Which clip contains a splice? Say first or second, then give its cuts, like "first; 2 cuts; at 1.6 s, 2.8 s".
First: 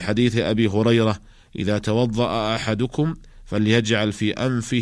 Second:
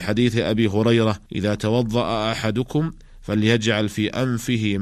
second; 1 cut; at 1.2 s